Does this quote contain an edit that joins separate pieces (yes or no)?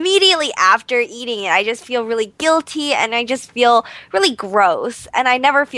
no